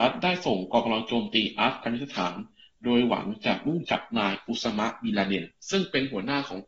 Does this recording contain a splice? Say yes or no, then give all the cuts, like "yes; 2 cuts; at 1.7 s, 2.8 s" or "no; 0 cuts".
no; 0 cuts